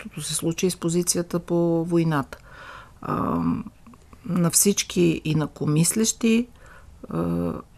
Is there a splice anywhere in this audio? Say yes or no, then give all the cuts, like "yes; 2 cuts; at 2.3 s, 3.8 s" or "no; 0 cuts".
no; 0 cuts